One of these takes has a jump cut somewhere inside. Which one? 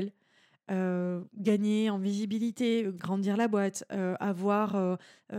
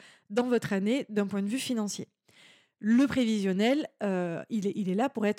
first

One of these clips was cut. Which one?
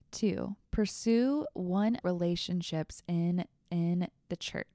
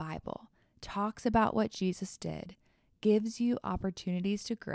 first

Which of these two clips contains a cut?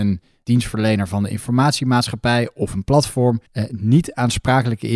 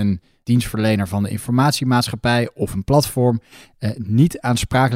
first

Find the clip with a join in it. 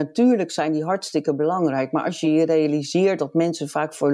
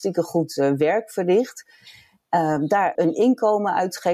second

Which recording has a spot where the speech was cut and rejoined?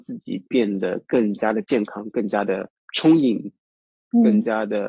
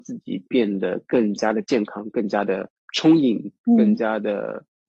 second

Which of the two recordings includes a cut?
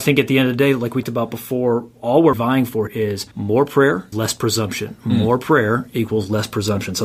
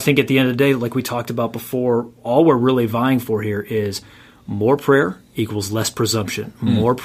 first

